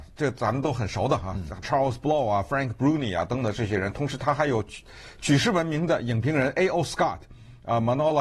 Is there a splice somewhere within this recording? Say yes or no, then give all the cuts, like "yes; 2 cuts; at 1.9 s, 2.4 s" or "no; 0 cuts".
yes; 1 cut; at 1.6 s